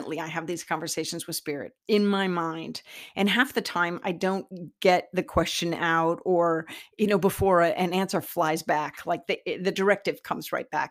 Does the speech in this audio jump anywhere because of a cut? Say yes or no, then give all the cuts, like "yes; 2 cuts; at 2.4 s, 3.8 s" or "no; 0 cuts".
yes; 1 cut; at 1.8 s